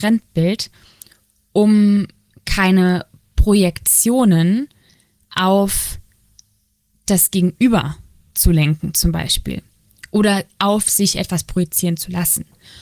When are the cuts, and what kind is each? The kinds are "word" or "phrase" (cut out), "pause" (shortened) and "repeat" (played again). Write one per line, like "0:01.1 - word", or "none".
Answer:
none